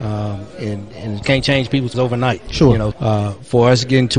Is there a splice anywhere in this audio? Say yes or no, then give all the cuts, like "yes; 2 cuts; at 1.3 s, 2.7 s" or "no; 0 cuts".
yes; 3 cuts; at 1.2 s, 1.9 s, 2.9 s